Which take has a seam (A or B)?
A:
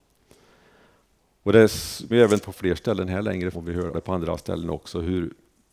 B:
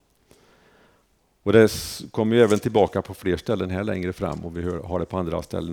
A